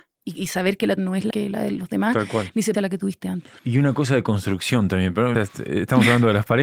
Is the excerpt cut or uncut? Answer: cut